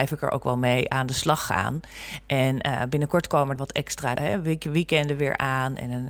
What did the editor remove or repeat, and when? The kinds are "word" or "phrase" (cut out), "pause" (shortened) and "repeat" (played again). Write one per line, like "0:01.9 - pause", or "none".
0:03.6 - word
0:04.2 - word